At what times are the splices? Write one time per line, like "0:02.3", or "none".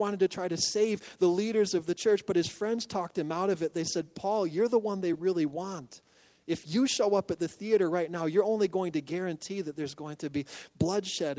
none